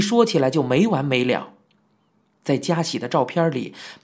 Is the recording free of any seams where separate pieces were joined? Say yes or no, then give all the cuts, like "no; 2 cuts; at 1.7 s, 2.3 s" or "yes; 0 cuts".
yes; 0 cuts